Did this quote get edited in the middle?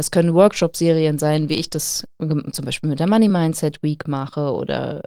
no; 0 cuts

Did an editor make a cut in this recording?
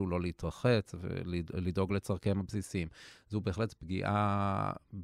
no; 0 cuts

